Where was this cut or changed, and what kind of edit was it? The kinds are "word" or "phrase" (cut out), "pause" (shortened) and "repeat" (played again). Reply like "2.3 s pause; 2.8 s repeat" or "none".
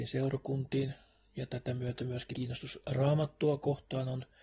2.3 s word